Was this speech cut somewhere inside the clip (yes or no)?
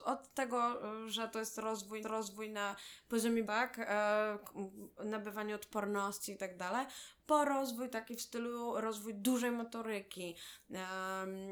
yes